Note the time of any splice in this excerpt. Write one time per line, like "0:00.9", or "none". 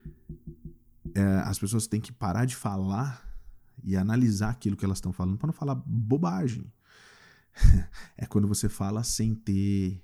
none